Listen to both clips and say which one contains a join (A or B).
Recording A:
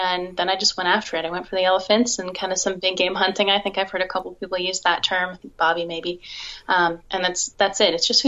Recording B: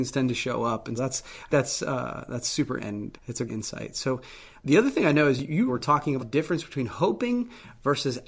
B